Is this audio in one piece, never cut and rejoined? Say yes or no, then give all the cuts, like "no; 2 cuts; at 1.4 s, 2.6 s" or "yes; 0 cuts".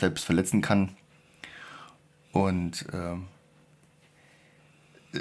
yes; 0 cuts